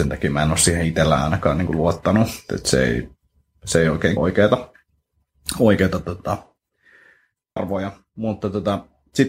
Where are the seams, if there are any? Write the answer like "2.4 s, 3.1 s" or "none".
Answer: 2.5 s, 4.2 s, 7.6 s